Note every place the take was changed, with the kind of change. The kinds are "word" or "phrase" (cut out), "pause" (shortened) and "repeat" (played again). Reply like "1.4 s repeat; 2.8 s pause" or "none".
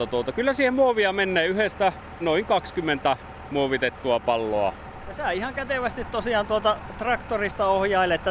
2.2 s phrase